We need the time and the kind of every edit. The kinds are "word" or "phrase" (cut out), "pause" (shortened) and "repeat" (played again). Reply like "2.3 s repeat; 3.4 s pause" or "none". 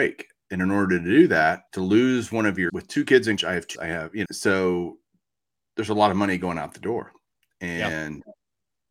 1.7 s pause; 2.7 s word; 3.4 s word; 3.7 s word; 4.2 s word